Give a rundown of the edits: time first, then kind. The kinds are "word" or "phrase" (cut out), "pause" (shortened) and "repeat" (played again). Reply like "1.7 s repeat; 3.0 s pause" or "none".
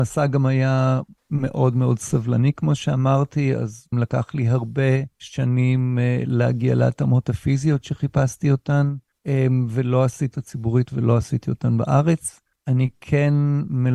3.9 s word; 5.1 s pause; 10.3 s phrase